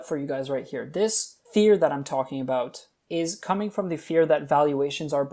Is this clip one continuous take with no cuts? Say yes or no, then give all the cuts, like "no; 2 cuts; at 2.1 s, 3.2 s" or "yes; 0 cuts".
no; 1 cut; at 1.4 s